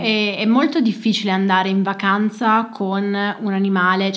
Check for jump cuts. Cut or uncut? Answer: uncut